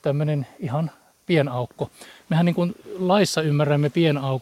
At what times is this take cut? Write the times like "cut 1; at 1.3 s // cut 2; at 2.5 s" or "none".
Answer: none